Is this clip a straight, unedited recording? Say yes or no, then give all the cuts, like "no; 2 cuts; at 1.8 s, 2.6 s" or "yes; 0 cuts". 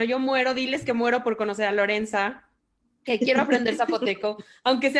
yes; 0 cuts